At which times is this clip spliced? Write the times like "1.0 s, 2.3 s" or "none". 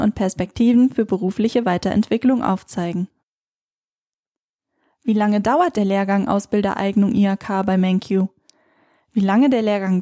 none